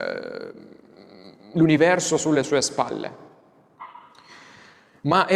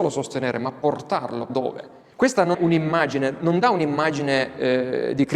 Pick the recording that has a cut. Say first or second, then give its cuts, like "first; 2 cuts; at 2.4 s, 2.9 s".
second; 3 cuts; at 1.5 s, 2.1 s, 2.5 s